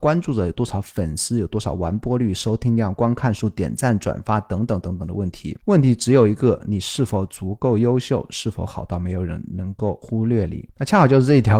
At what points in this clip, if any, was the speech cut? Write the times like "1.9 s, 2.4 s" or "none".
none